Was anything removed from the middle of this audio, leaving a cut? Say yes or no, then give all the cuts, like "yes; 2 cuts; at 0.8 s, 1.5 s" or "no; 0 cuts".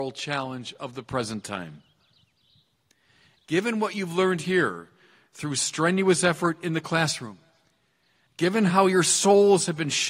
no; 0 cuts